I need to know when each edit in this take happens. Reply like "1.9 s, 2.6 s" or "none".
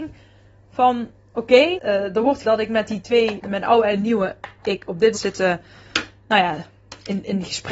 1.8 s, 2.4 s, 3.4 s, 5.1 s